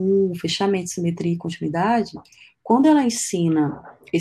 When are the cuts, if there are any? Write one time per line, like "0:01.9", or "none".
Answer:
none